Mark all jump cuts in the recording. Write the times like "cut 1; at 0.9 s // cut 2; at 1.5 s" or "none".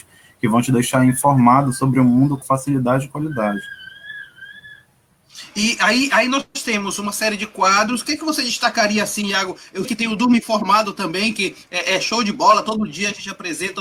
cut 1; at 2.4 s // cut 2; at 9.8 s